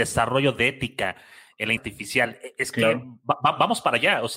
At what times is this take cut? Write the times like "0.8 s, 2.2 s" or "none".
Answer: 1.8 s